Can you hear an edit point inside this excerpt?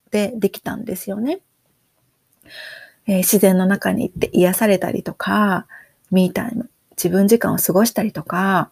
no; 0 cuts

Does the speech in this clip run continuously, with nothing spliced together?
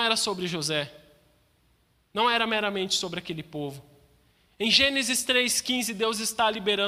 yes; 0 cuts

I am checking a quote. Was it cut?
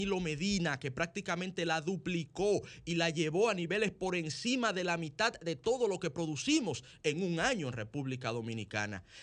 no; 0 cuts

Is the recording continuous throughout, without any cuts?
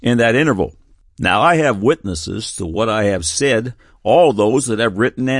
yes; 0 cuts

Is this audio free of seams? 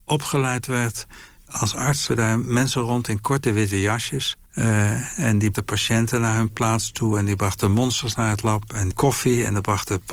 no; 5 cuts; at 1.4 s, 2.1 s, 4.5 s, 5.5 s, 8.9 s

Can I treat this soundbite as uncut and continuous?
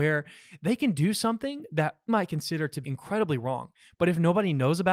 no; 2 cuts; at 2.1 s, 2.8 s

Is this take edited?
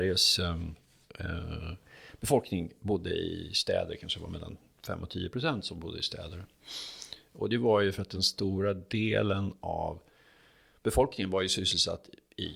no; 0 cuts

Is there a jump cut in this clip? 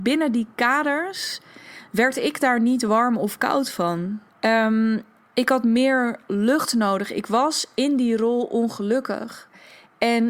yes; 1 cut; at 4.3 s

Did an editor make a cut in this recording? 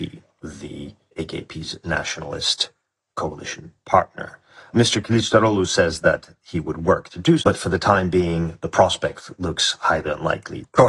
yes; 1 cut; at 7.4 s

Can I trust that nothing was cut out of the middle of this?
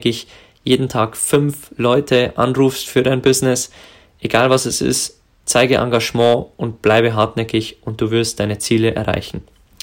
yes; 0 cuts

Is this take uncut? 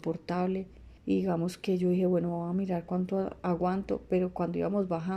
no; 1 cut; at 1.0 s

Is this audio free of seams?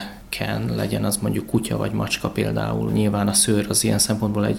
yes; 0 cuts

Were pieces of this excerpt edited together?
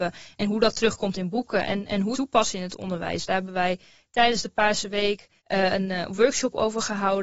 yes; 2 cuts; at 2.1 s, 5.4 s

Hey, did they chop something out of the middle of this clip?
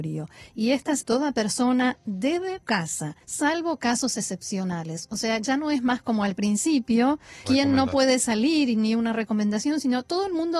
yes; 4 cuts; at 1.0 s, 2.6 s, 3.2 s, 7.4 s

